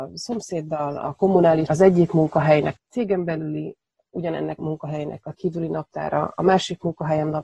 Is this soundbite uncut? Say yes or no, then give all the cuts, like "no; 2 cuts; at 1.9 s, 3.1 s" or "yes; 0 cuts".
no; 4 cuts; at 1.7 s, 2.8 s, 4.6 s, 5.3 s